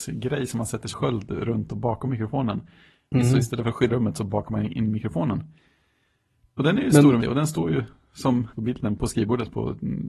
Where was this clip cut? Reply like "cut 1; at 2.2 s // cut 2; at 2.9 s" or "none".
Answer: cut 1; at 0.9 s // cut 2; at 3.9 s // cut 3; at 7.2 s // cut 4; at 8.5 s // cut 5; at 9.0 s